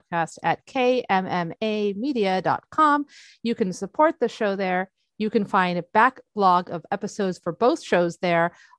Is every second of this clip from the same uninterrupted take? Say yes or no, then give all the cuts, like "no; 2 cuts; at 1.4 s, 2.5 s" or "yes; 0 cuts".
yes; 0 cuts